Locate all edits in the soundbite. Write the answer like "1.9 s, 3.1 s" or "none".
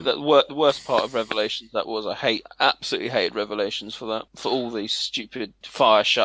4.3 s